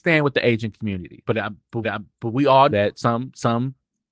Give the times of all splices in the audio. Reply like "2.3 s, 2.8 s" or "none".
1.3 s, 1.8 s, 2.7 s